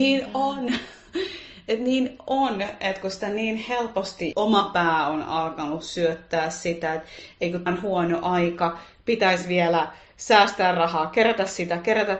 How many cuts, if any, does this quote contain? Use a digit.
2